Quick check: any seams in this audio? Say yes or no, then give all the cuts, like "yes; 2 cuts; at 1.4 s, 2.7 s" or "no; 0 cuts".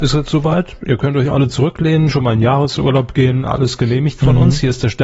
no; 0 cuts